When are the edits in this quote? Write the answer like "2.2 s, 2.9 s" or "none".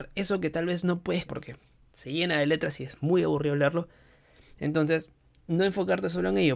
1.3 s